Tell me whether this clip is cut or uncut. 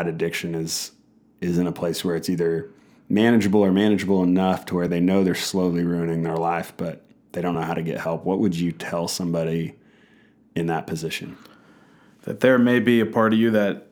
uncut